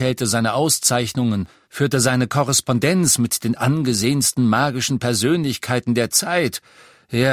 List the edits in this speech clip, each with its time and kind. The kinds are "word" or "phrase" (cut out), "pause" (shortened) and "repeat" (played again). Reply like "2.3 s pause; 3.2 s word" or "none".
1.6 s pause